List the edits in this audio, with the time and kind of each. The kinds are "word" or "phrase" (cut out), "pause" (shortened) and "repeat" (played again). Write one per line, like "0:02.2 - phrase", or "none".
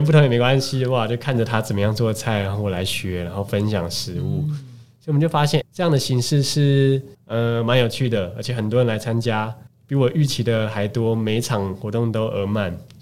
0:05.6 - word
0:07.1 - pause
0:09.7 - pause